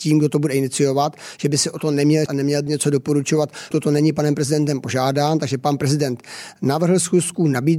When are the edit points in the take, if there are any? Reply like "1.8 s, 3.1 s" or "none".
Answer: 2.3 s, 2.7 s, 3.7 s